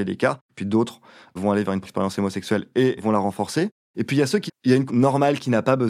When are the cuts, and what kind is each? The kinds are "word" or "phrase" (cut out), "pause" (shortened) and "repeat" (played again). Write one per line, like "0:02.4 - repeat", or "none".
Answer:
0:01.8 - word
0:03.0 - word
0:04.5 - word
0:04.9 - word